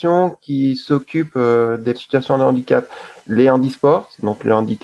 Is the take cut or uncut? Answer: cut